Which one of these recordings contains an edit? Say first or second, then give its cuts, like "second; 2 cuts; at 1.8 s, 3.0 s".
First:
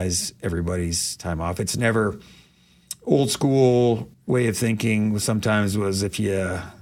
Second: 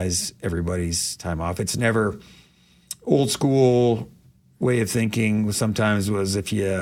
first; 1 cut; at 4.1 s